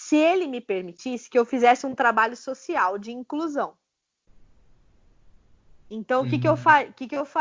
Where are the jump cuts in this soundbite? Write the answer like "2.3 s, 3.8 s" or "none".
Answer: none